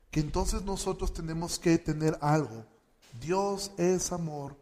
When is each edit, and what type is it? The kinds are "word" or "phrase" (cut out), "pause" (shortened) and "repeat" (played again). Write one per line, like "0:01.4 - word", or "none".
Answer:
none